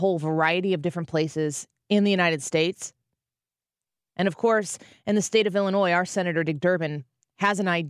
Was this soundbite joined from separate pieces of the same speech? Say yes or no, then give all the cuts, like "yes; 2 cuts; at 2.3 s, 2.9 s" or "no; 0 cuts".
no; 0 cuts